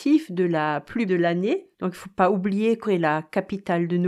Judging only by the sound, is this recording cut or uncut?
cut